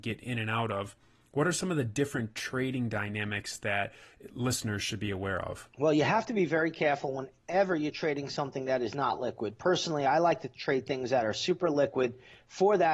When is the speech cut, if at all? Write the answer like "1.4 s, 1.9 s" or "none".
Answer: none